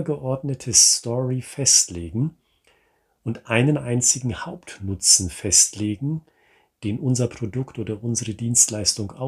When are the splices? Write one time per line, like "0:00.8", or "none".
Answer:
none

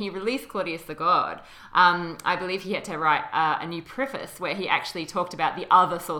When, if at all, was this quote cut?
none

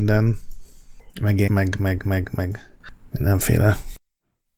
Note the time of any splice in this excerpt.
0:01.1
0:01.5
0:02.0

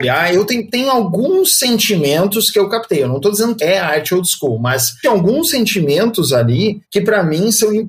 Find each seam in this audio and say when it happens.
0:03.6
0:05.0
0:06.8

